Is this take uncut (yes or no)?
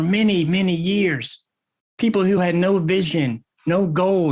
yes